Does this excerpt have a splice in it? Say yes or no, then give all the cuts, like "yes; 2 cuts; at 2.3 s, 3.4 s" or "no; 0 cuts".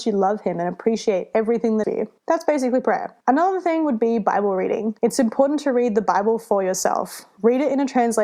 yes; 4 cuts; at 1.8 s, 2.2 s, 3.2 s, 5.0 s